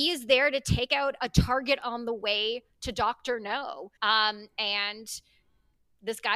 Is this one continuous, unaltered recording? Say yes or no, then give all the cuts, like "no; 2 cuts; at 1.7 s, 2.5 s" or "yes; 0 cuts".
no; 2 cuts; at 1.2 s, 4.0 s